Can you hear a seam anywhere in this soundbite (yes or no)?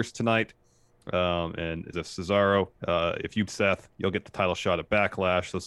yes